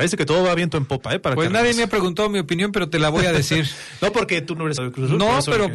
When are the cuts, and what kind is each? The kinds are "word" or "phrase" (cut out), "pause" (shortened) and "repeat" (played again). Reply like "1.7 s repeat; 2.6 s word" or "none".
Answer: 4.8 s word